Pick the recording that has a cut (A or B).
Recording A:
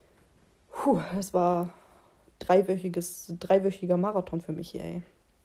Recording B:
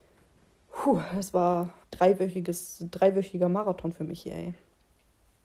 B